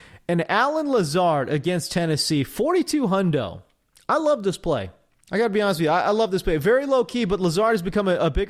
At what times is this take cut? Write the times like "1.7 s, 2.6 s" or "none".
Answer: none